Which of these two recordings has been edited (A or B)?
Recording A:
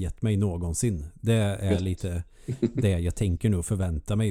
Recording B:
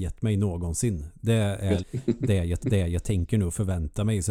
B